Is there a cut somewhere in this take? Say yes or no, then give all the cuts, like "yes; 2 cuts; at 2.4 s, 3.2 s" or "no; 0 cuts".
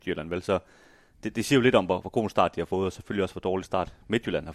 no; 0 cuts